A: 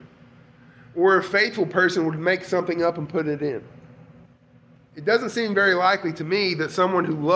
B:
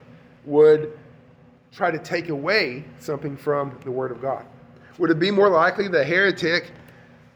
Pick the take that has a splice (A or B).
A